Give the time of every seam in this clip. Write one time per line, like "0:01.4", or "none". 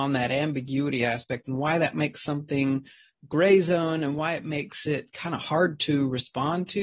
none